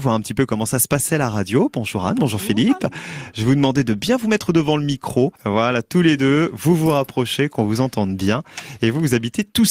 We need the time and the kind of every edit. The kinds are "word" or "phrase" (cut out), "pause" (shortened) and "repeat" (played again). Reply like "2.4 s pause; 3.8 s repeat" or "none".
5.4 s pause